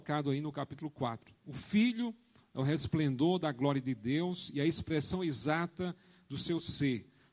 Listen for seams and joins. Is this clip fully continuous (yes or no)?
yes